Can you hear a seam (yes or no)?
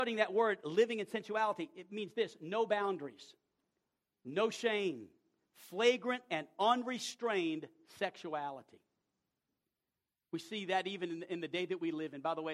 no